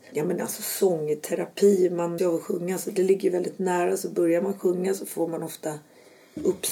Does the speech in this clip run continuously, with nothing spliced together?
no; 1 cut; at 2.2 s

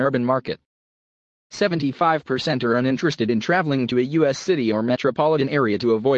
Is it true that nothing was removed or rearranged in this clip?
yes; 0 cuts

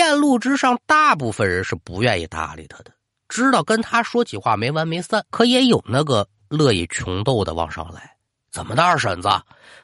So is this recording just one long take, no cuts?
no; 1 cut; at 5.3 s

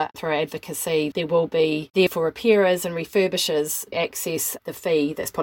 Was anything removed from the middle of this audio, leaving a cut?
yes; 3 cuts; at 1.1 s, 2.1 s, 3.9 s

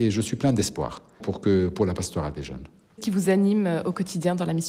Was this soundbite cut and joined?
yes; 2 cuts; at 1.2 s, 3.0 s

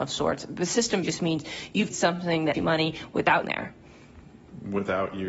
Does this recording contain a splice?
yes; 4 cuts; at 1.0 s, 1.9 s, 2.5 s, 3.4 s

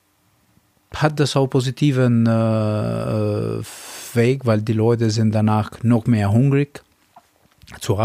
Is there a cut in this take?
no; 0 cuts

